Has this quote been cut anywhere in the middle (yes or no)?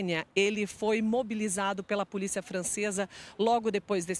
no